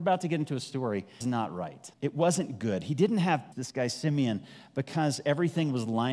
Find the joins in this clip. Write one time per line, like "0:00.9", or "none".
0:01.2
0:01.9
0:03.5